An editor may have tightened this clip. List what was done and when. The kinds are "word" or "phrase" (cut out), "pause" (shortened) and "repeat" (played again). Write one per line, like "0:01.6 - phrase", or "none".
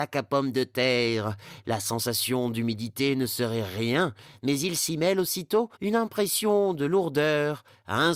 0:05.8 - pause